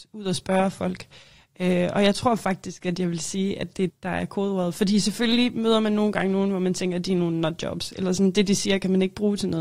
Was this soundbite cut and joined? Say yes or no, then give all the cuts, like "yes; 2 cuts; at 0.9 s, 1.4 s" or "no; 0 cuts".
yes; 1 cut; at 3.9 s